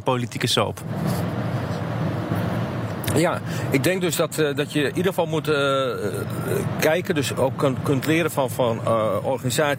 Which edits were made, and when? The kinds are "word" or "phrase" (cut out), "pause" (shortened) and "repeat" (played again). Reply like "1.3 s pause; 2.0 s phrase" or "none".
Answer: none